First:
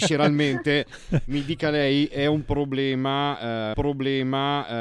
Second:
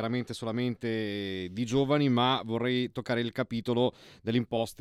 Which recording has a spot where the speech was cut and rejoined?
first; 1 cut; at 3.7 s

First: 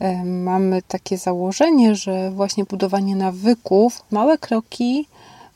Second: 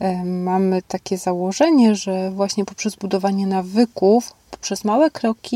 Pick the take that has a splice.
first; 2 cuts; at 2.6 s, 4.1 s

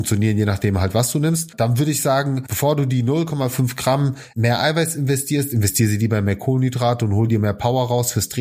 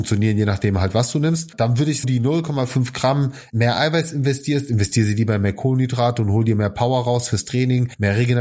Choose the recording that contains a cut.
second; 1 cut; at 2.0 s

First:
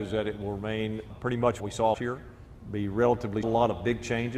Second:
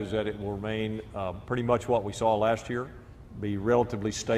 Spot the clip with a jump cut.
first; 4 cuts; at 1.1 s, 1.6 s, 1.9 s, 3.4 s

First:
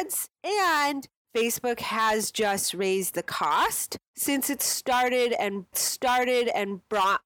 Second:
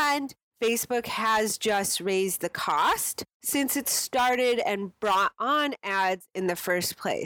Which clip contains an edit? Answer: first; 1 cut; at 5.7 s

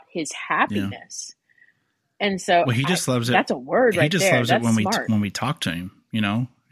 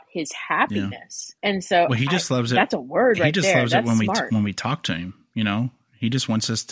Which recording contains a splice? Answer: second; 1 cut; at 1.4 s

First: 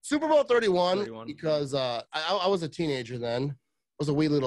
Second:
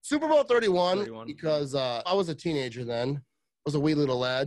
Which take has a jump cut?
second; 1 cut; at 2.1 s

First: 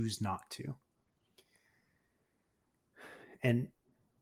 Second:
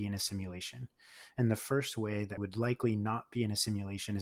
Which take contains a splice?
second; 1 cut; at 2.4 s

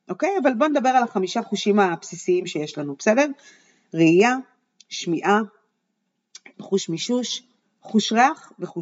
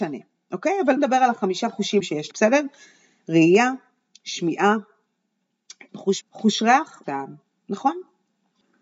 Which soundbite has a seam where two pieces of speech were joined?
second; 5 cuts; at 1.0 s, 2.0 s, 2.3 s, 6.2 s, 7.0 s

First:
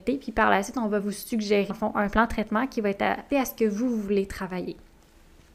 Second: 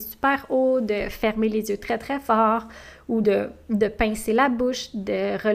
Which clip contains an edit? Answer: first; 2 cuts; at 1.7 s, 3.3 s

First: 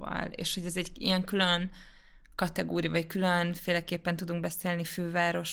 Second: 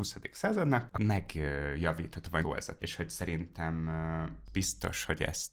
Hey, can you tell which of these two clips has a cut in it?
second; 4 cuts; at 0.9 s, 2.4 s, 2.8 s, 4.5 s

